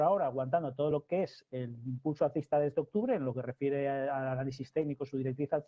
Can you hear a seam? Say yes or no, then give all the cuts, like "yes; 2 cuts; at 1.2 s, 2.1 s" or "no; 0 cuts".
no; 0 cuts